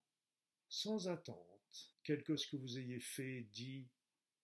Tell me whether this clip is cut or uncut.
cut